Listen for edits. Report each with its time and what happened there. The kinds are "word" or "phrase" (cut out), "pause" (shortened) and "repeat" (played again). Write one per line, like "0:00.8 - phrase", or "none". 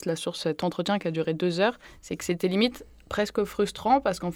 none

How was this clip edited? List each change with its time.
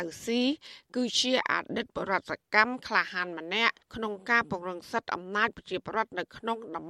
0:03.8 - pause

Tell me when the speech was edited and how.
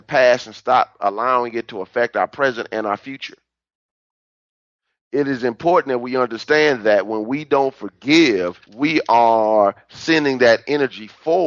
0:08.6 - pause

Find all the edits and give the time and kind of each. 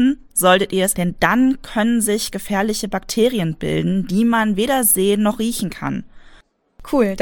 0:00.9 - word

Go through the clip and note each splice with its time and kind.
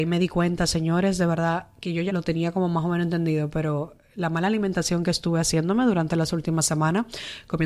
0:02.1 - word

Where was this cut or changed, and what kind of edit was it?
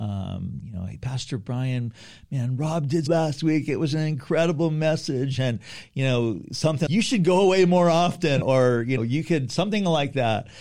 0:03.1 - phrase
0:06.9 - word
0:08.4 - word
0:09.0 - word

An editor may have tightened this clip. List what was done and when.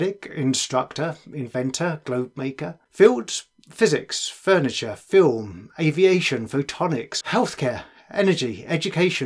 0:02.9 - pause
0:07.2 - word

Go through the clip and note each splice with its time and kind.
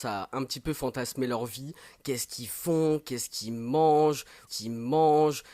0:04.5 - repeat

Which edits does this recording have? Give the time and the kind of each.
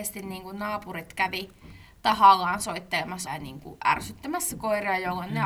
0:03.3 - word

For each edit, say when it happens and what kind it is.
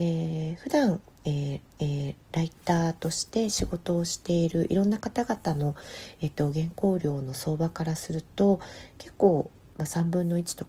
0:01.6 - repeat

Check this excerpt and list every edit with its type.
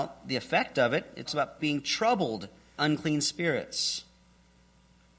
0:01.3 - word
0:01.6 - word
0:02.8 - word

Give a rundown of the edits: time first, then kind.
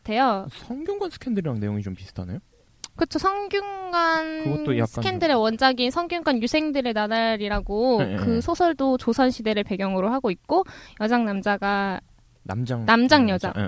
none

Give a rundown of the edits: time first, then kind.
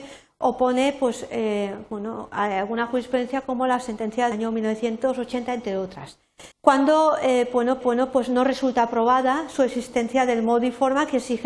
0:04.3 - word
0:06.5 - pause
0:07.8 - repeat

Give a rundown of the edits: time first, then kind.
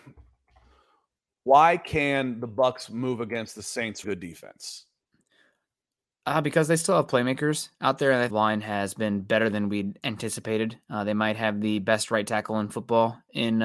0:04.0 - word
0:08.3 - phrase

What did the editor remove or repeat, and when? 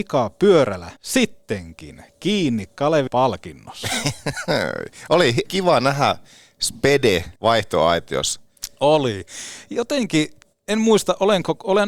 0:01.0 - pause
0:03.1 - word
0:05.5 - word
0:07.4 - pause
0:10.5 - pause

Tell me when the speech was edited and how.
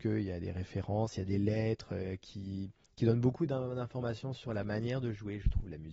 none

